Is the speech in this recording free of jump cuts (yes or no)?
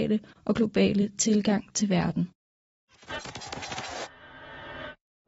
yes